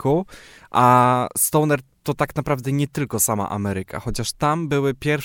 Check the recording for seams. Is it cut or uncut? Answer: uncut